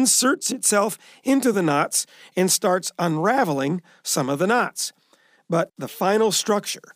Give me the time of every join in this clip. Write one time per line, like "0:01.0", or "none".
none